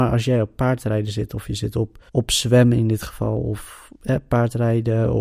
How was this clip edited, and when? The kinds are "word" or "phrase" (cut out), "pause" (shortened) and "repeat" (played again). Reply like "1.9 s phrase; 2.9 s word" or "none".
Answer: 2.1 s pause